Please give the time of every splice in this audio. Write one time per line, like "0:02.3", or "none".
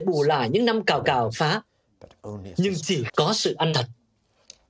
0:01.3
0:03.1
0:03.7